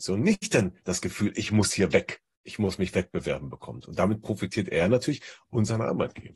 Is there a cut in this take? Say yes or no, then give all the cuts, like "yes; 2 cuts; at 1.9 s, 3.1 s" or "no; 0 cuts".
no; 0 cuts